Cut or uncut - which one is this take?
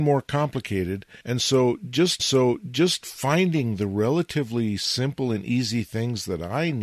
cut